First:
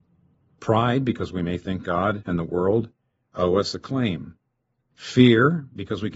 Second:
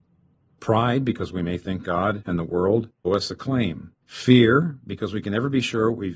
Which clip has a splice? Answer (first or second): second